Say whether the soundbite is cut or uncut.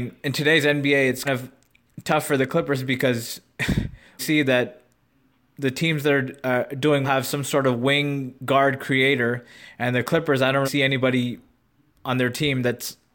cut